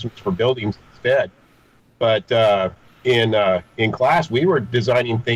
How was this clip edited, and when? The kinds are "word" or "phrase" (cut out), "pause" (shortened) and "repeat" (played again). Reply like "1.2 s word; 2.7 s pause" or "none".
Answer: none